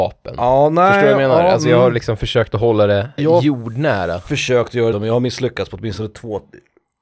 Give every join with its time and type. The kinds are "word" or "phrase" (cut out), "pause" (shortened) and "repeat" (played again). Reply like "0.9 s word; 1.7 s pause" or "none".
3.2 s word; 4.9 s word